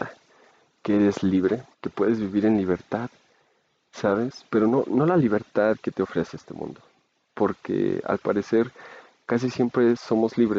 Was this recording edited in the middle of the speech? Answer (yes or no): yes